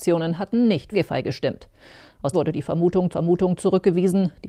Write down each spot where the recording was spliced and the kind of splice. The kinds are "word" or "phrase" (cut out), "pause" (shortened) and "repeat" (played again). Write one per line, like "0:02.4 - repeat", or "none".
0:00.9 - phrase
0:02.3 - phrase
0:03.1 - repeat

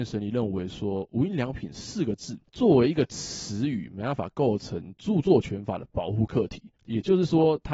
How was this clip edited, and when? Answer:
0:02.5 - pause
0:06.7 - pause

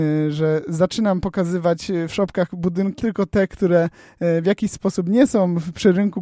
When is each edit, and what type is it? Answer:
0:03.0 - word

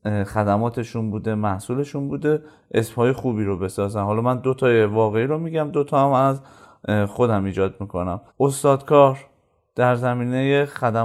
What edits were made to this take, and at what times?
0:08.3 - pause

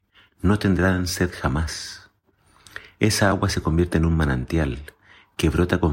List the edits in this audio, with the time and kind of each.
none

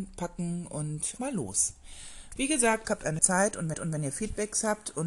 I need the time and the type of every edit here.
0:01.2 - word
0:02.8 - phrase
0:03.2 - word
0:03.7 - repeat

